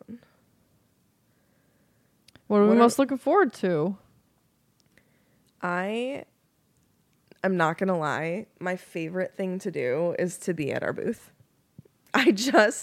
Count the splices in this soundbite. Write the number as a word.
zero